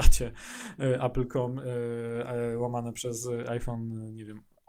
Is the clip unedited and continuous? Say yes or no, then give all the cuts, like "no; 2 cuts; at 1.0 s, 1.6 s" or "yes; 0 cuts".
yes; 0 cuts